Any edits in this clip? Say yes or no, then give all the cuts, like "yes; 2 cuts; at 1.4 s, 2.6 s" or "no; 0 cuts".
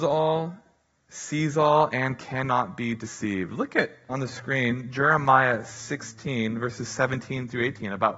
yes; 1 cut; at 4.1 s